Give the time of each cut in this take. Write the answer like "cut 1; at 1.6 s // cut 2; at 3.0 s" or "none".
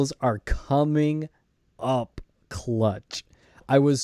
none